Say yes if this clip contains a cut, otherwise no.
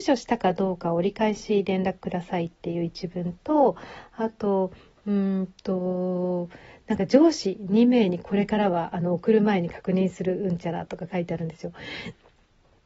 no